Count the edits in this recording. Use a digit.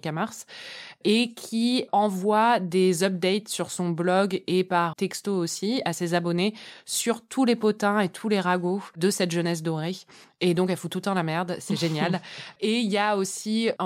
1